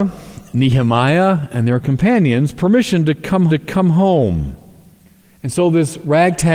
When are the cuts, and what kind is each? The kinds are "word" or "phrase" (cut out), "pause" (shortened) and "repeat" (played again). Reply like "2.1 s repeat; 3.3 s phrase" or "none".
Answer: 3.5 s repeat

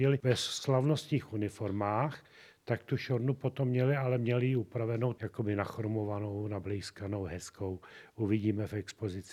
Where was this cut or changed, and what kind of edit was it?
none

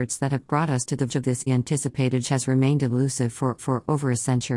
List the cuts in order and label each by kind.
1.1 s word; 1.5 s word; 2.2 s phrase; 3.6 s repeat

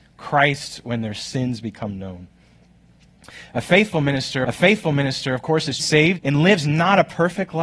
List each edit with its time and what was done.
4.4 s repeat; 5.8 s word; 6.2 s word

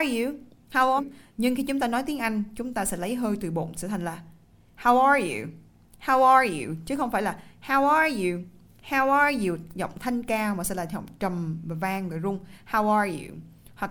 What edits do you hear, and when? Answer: 1.0 s word

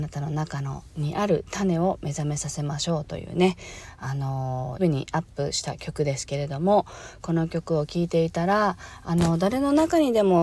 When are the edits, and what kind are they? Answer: 4.8 s word

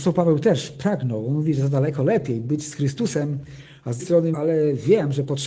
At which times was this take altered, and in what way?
4.0 s word; 4.3 s word

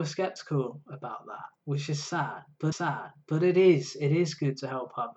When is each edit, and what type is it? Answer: 2.7 s repeat

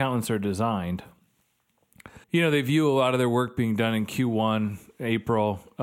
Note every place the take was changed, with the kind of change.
2.2 s pause

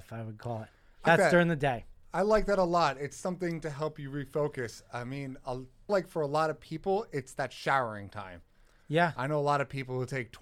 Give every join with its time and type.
1.1 s word; 5.9 s word

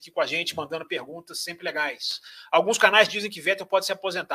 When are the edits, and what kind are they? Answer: none

